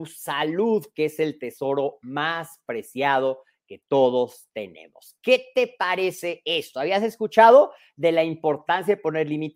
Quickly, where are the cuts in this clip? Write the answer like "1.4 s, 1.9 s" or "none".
none